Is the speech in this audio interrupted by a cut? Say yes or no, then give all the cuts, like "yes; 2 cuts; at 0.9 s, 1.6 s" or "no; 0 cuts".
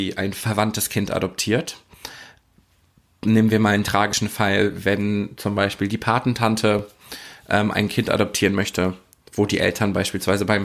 no; 0 cuts